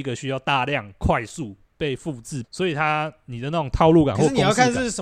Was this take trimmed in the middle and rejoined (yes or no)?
yes